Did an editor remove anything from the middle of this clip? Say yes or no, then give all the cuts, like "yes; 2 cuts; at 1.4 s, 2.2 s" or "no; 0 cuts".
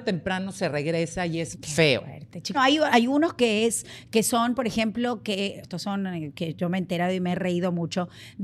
yes; 3 cuts; at 1.5 s, 2.5 s, 5.6 s